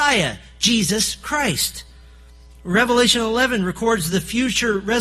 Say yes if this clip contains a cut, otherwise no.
no